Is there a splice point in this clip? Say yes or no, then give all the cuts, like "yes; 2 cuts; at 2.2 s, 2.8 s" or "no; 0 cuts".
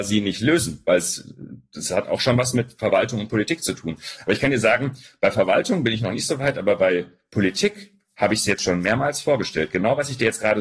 no; 0 cuts